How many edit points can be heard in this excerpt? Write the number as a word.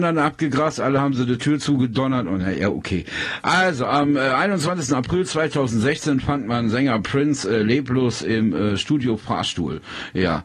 zero